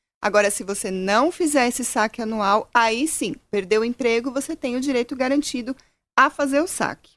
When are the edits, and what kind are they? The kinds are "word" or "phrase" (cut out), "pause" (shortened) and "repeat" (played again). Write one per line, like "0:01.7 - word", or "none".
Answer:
none